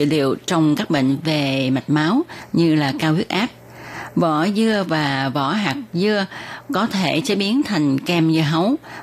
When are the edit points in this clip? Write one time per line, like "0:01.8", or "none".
none